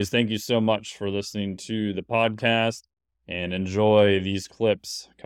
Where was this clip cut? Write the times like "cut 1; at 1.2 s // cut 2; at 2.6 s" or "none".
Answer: none

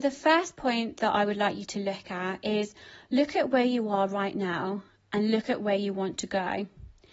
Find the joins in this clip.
none

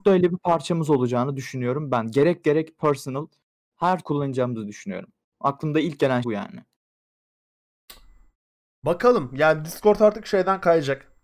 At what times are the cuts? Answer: cut 1; at 2.4 s // cut 2; at 4.0 s // cut 3; at 6.2 s

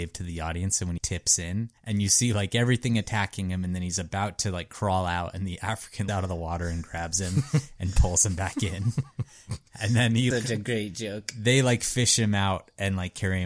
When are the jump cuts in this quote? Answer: cut 1; at 1.0 s // cut 2; at 1.8 s // cut 3; at 6.1 s // cut 4; at 10.3 s

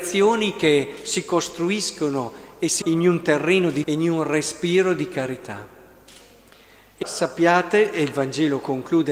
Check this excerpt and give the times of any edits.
cut 1; at 2.8 s // cut 2; at 3.8 s // cut 3; at 7.0 s

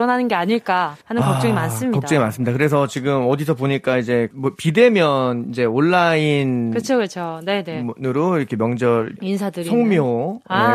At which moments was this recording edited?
cut 1; at 1.0 s

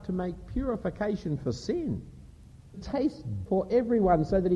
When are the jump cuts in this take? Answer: cut 1; at 2.7 s // cut 2; at 3.5 s

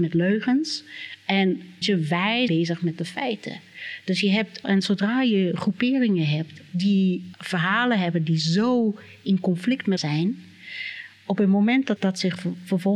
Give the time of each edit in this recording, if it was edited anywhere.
cut 1; at 1.8 s // cut 2; at 2.5 s // cut 3; at 4.6 s // cut 4; at 7.3 s // cut 5; at 10.0 s // cut 6; at 12.0 s

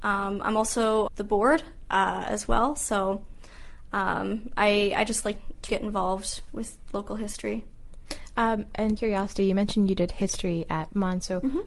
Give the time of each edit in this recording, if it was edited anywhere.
cut 1; at 1.1 s // cut 2; at 5.3 s // cut 3; at 5.7 s // cut 4; at 6.5 s // cut 5; at 9.0 s

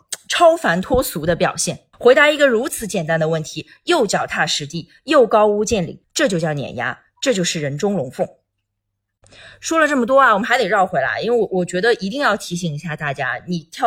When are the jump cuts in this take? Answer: cut 1; at 1.9 s // cut 2; at 6.0 s

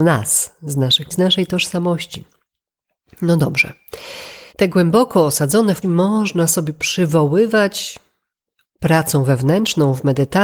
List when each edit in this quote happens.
cut 1; at 1.1 s // cut 2; at 4.5 s // cut 3; at 5.8 s

